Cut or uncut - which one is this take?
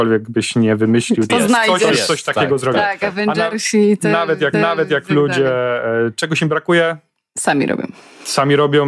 cut